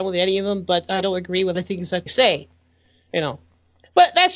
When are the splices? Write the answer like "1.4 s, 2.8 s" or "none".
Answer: 1.5 s, 2.1 s